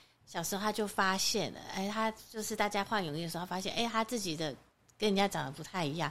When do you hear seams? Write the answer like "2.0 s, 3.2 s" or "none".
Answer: none

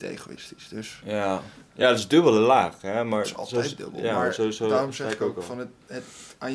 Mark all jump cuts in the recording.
none

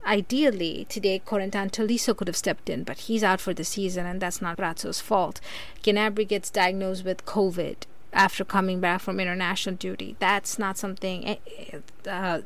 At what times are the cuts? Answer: 4.5 s

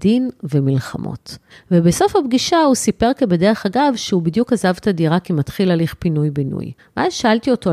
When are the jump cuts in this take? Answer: 1.5 s, 6.8 s

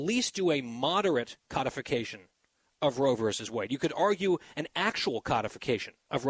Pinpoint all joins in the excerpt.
none

